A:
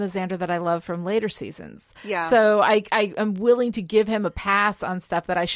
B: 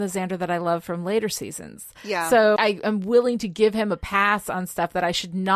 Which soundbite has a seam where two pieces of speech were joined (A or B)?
B